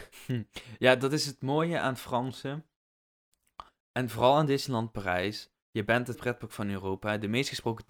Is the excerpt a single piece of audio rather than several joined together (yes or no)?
no